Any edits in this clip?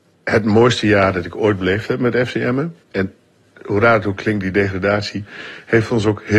yes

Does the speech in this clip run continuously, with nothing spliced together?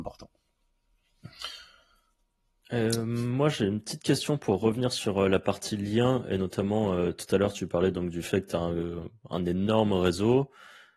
yes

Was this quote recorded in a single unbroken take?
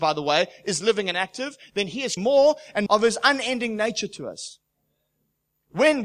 no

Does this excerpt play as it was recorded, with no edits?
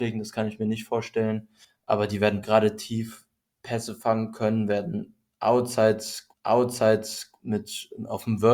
no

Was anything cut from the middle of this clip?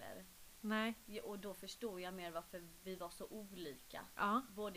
no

